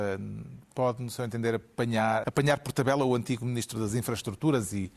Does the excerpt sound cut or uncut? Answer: cut